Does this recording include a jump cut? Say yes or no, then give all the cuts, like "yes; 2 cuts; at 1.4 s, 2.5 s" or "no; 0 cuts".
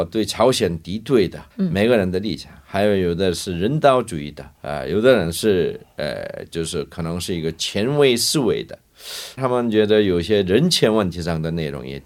yes; 3 cuts; at 1.5 s, 4.5 s, 9.4 s